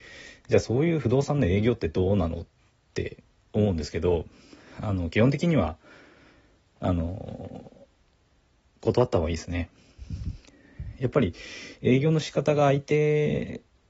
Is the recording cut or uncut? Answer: uncut